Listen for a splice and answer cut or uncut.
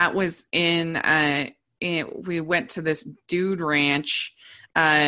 uncut